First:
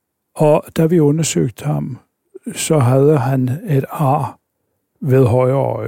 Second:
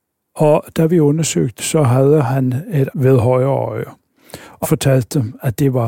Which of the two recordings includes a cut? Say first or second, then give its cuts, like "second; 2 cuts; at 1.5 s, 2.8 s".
second; 3 cuts; at 1.6 s, 2.9 s, 4.6 s